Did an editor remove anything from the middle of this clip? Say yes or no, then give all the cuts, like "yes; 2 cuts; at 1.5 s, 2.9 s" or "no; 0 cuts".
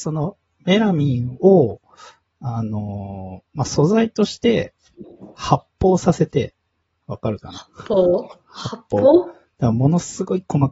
no; 0 cuts